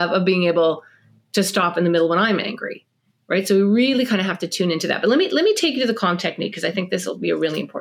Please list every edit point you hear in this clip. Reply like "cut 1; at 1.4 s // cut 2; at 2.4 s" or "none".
none